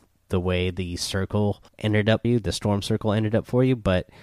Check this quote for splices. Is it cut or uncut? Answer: cut